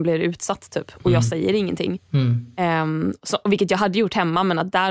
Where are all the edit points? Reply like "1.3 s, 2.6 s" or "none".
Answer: none